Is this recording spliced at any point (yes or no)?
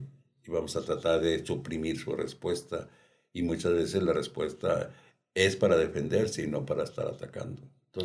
no